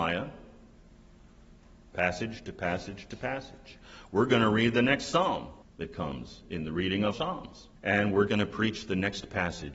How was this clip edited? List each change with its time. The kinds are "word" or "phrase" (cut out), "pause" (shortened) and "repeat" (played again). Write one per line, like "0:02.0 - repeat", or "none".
0:05.6 - pause
0:07.1 - word
0:07.8 - pause
0:08.3 - word